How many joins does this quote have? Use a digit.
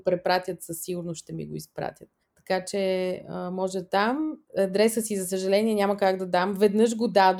2